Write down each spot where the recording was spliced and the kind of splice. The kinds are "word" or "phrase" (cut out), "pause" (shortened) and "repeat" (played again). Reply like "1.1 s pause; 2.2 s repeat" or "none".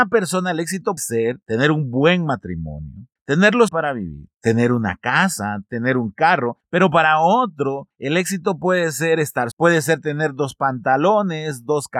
1.0 s word; 3.7 s word; 9.5 s word